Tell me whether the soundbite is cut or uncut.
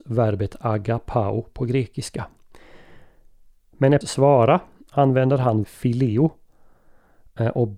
cut